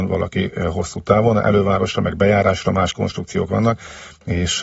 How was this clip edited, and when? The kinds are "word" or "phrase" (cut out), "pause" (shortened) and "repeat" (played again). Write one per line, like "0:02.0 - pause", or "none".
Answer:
none